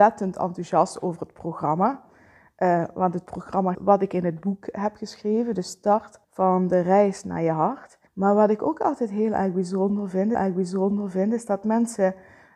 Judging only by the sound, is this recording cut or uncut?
cut